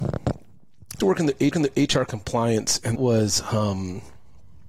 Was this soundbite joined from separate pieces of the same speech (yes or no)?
yes